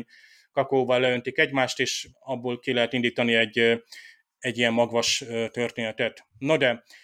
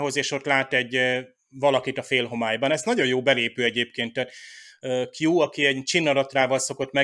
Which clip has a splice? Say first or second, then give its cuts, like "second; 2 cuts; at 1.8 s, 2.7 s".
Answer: first; 1 cut; at 2.1 s